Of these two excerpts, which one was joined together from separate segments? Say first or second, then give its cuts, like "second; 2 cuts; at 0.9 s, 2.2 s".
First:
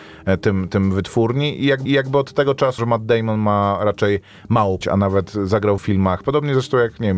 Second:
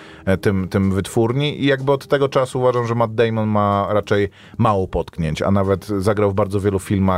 first; 4 cuts; at 1.9 s, 2.8 s, 4.8 s, 5.8 s